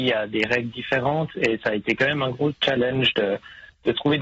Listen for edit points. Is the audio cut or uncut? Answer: uncut